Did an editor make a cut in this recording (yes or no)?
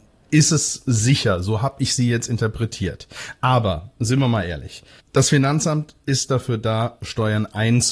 yes